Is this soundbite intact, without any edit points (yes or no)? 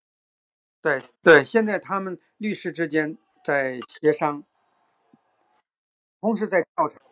no